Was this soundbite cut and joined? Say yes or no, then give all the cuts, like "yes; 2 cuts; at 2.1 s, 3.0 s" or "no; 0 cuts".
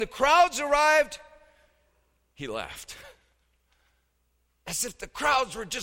no; 0 cuts